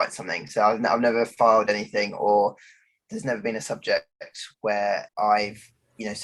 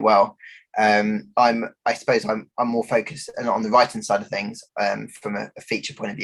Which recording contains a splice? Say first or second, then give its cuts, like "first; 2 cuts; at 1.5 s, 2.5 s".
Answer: first; 1 cut; at 5.1 s